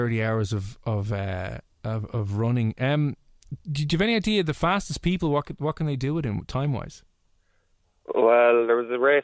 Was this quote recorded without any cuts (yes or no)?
yes